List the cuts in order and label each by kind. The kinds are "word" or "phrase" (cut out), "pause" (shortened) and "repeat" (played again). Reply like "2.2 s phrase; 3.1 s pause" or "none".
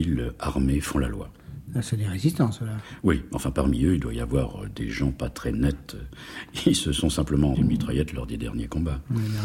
7.5 s word